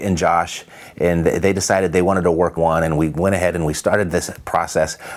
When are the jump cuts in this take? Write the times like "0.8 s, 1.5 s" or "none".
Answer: 2.6 s